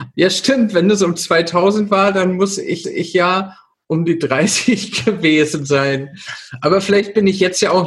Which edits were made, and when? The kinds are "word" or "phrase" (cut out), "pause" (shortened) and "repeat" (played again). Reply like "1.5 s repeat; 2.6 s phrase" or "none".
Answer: 2.8 s repeat